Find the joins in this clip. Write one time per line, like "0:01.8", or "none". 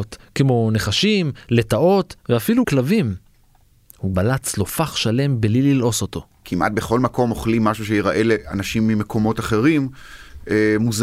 0:02.6
0:04.1